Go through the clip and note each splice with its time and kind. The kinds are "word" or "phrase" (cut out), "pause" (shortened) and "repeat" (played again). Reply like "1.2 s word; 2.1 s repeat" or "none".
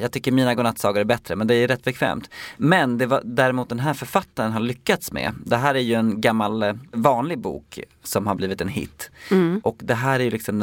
none